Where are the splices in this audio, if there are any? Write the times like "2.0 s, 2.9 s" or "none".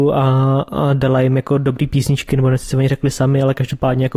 none